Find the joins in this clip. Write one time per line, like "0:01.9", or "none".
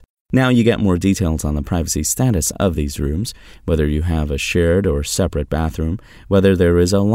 none